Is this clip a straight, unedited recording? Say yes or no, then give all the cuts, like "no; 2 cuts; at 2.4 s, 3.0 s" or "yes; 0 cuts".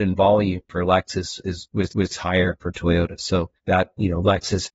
no; 2 cuts; at 1.9 s, 3.6 s